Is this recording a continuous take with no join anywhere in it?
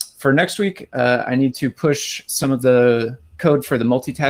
yes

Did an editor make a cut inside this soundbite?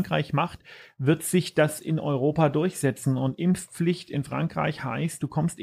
no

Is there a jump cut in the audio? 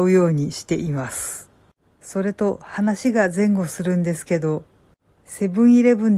no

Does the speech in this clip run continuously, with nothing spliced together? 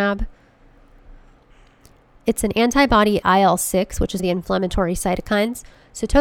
no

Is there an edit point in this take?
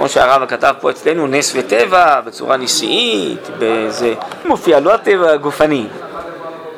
yes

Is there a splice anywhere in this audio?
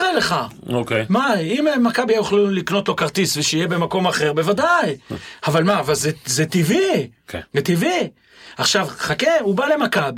no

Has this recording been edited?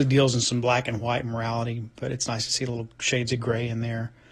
no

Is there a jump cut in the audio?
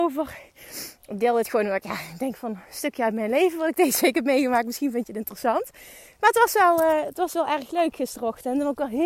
no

